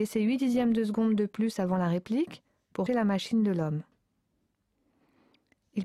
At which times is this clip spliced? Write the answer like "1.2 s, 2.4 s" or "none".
2.9 s